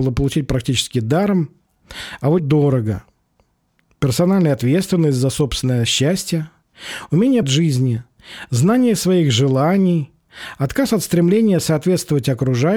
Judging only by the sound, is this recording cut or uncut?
cut